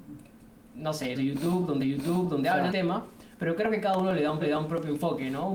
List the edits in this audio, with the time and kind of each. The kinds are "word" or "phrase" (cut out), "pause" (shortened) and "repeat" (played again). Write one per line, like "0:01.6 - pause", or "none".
0:01.1 - word
0:01.8 - repeat
0:02.7 - word
0:03.3 - pause
0:04.4 - repeat